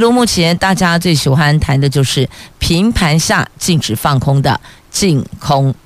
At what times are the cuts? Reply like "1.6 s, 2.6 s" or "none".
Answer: none